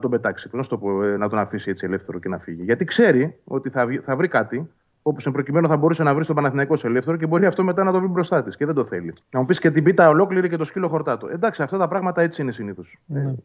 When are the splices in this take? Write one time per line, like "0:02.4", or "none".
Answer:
0:04.8
0:09.2